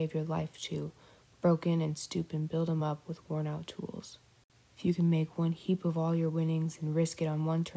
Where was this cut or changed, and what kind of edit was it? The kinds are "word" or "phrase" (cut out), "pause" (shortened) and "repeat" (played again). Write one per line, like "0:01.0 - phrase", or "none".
none